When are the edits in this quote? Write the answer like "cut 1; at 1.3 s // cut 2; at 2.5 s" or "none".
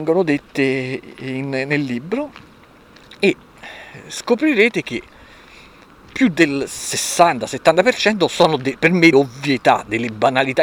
cut 1; at 9.1 s

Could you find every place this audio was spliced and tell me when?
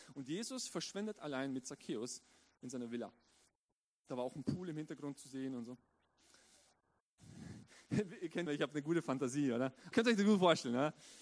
cut 1; at 8.5 s // cut 2; at 9.9 s

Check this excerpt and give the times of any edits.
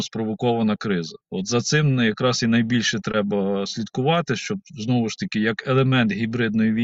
cut 1; at 1.2 s

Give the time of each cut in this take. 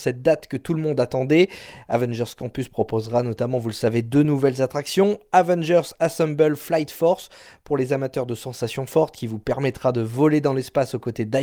none

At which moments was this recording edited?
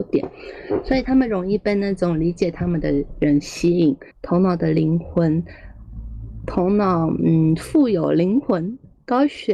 cut 1; at 4.1 s

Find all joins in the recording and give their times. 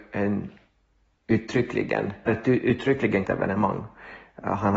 cut 1; at 2.3 s // cut 2; at 3.2 s

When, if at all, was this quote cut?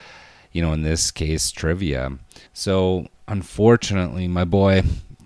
cut 1; at 2.5 s

